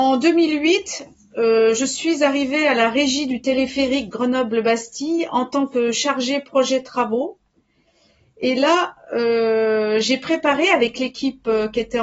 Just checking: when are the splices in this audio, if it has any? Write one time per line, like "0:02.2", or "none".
none